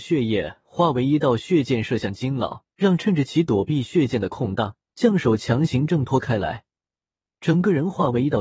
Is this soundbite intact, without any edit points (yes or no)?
no